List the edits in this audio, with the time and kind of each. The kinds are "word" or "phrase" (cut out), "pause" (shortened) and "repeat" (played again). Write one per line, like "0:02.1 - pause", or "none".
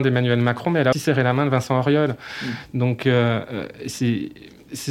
0:00.9 - word